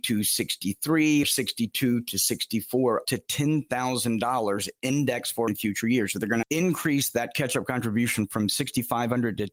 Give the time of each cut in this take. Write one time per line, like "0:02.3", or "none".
0:01.2
0:03.0
0:05.5
0:06.4